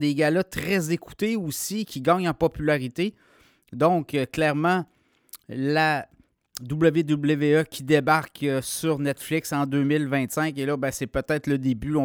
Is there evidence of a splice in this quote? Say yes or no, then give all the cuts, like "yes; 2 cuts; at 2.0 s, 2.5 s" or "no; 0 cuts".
no; 0 cuts